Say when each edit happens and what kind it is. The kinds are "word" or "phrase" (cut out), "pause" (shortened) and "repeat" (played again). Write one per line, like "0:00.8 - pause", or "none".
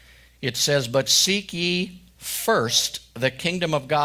none